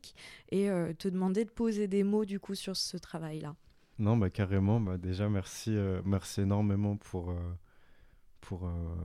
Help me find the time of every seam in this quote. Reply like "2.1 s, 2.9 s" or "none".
none